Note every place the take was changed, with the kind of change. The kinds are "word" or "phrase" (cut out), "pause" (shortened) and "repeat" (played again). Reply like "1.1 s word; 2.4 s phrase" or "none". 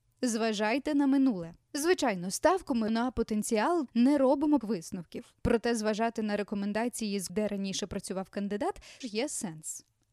1.6 s pause; 2.9 s word; 3.9 s word; 4.6 s word; 5.4 s pause; 7.3 s word; 9.0 s word